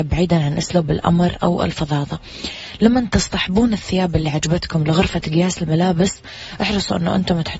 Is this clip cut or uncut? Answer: uncut